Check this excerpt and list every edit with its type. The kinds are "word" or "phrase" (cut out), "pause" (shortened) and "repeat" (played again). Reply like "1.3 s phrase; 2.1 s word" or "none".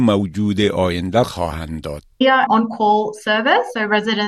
1.2 s phrase; 2.1 s pause; 2.5 s word

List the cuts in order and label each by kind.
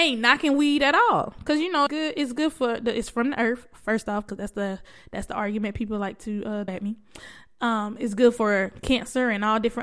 1.9 s word; 6.7 s word

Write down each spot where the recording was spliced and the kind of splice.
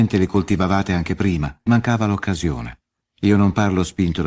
1.7 s phrase; 3.0 s pause

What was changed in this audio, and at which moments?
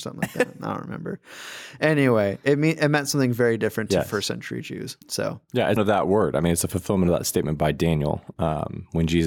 5.0 s pause; 5.8 s phrase

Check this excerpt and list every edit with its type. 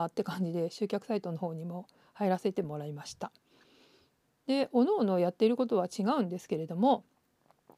none

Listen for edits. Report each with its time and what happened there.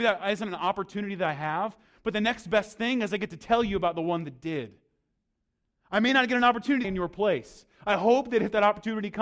6.8 s phrase

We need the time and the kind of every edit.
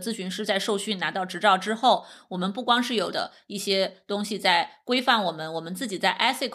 3.1 s word

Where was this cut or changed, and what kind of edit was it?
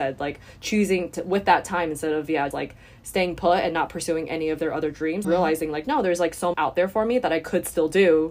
2.5 s word; 5.2 s word; 6.5 s word

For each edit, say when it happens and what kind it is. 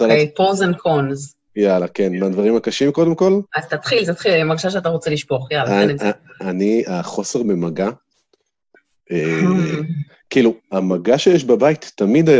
none

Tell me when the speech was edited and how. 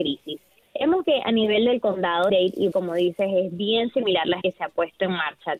1.0 s word; 2.3 s phrase; 2.7 s word; 4.4 s word

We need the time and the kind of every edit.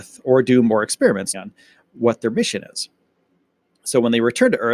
1.3 s word

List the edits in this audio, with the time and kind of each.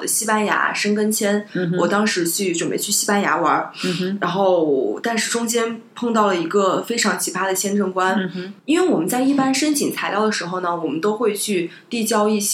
8.6 s pause

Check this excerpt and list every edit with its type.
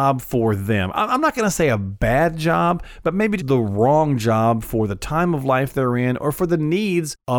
3.4 s word

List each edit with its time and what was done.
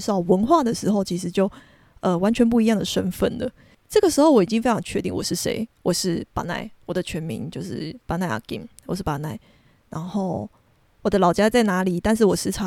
none

